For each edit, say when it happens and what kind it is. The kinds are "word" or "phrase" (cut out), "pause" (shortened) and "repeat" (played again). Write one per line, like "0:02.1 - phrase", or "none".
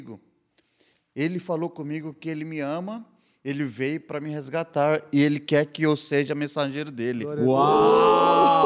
none